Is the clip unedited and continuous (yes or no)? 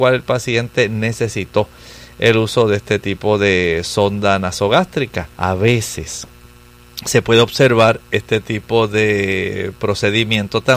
no